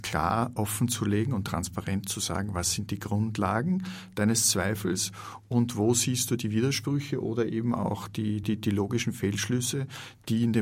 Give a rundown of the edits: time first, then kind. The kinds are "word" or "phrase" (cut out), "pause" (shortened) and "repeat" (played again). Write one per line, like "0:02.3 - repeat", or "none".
none